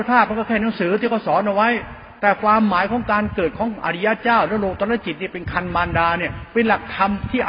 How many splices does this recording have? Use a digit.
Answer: 1